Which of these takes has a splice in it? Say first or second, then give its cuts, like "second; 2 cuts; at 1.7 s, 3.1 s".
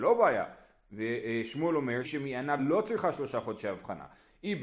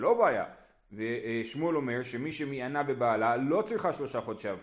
first; 2 cuts; at 2.0 s, 2.6 s